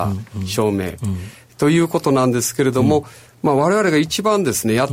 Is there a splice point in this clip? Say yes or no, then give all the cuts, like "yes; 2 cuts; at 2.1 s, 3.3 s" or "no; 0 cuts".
no; 0 cuts